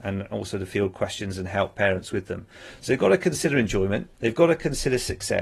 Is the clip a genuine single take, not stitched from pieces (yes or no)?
no